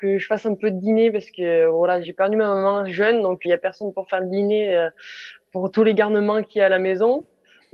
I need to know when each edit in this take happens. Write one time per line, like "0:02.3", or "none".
0:02.0
0:03.4